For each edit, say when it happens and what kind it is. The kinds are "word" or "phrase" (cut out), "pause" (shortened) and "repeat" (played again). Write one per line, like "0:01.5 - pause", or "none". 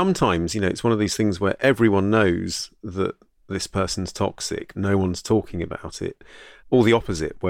0:03.4 - pause
0:04.7 - word
0:06.6 - word